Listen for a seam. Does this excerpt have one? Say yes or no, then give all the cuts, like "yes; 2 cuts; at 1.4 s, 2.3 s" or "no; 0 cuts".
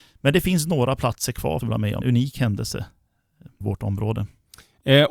yes; 3 cuts; at 1.6 s, 2.0 s, 3.6 s